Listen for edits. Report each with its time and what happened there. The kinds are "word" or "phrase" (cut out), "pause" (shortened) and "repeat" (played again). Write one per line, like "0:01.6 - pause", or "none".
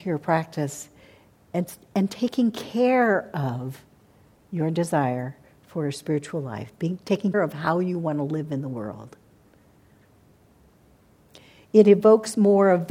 0:07.3 - word